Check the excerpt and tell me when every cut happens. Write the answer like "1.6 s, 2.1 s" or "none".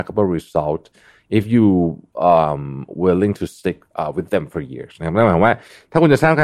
3.9 s